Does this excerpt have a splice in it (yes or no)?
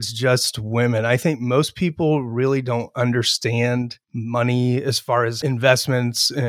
yes